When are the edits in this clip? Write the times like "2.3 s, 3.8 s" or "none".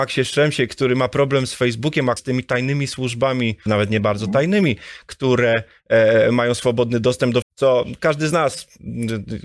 2.2 s, 3.7 s, 7.4 s

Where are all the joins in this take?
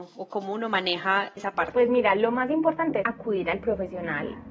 1.4 s, 3.0 s

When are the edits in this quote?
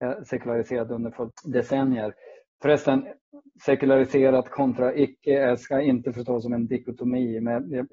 1.3 s, 5.6 s

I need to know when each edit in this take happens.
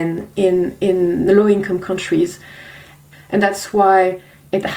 none

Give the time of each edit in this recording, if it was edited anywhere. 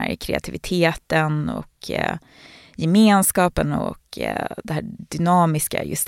none

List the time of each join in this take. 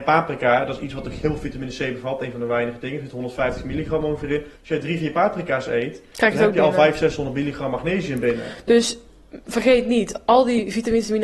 4.6 s

